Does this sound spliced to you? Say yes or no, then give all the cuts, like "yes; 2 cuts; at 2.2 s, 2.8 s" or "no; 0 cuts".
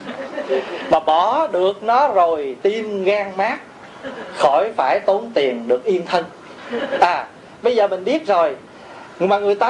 no; 0 cuts